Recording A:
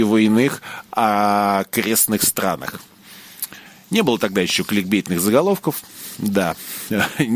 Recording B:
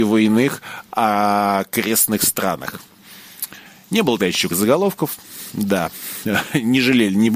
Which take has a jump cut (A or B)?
B